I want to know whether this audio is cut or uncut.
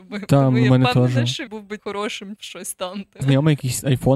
cut